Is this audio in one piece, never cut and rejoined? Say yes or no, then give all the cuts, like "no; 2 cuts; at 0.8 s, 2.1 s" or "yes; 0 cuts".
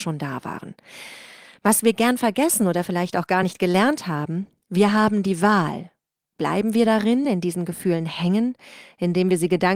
yes; 0 cuts